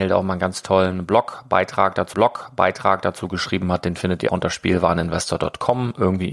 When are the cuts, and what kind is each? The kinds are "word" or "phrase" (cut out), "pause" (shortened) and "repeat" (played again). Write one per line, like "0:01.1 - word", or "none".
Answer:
0:02.1 - repeat
0:04.3 - word